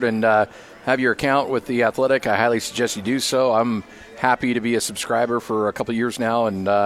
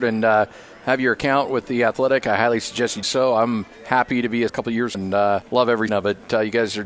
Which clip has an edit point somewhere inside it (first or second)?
second